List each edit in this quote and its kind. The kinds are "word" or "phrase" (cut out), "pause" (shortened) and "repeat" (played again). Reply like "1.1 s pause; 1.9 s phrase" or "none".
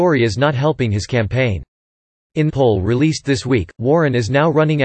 2.5 s phrase